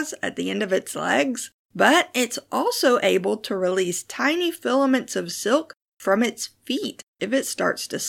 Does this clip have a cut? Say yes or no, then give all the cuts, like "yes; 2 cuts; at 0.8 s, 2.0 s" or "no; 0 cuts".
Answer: no; 0 cuts